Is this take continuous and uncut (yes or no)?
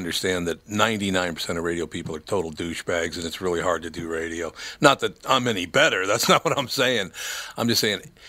yes